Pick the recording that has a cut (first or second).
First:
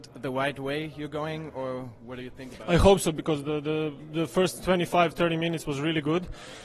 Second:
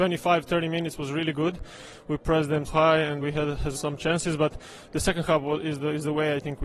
second